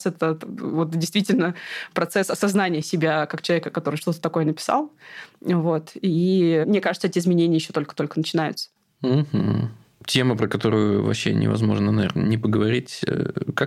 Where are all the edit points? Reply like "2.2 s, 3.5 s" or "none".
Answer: none